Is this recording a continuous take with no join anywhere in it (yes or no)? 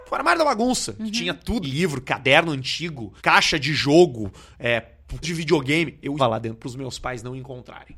no